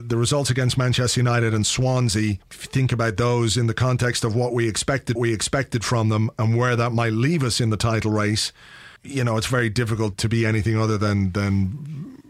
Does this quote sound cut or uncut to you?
cut